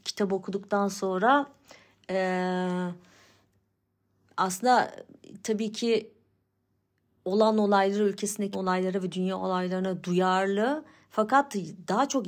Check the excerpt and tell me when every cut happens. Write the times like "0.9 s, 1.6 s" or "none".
8.5 s